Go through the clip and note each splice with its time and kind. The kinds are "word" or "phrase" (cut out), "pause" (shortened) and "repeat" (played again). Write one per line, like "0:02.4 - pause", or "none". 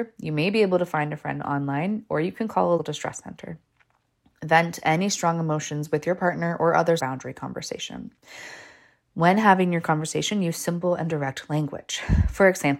0:02.8 - word
0:07.0 - phrase